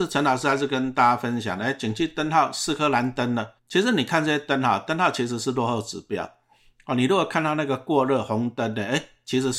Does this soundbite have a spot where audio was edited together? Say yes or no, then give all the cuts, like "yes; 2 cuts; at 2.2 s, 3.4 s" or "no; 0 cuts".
yes; 1 cut; at 3.6 s